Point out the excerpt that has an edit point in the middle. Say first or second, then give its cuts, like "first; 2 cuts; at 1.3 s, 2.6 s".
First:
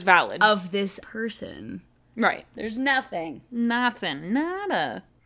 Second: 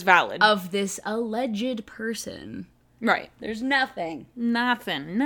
first; 1 cut; at 1.0 s